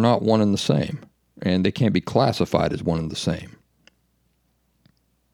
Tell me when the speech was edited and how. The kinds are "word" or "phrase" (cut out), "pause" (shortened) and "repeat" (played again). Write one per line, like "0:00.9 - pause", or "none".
none